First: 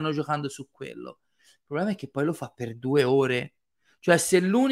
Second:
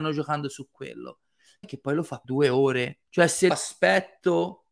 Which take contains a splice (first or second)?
second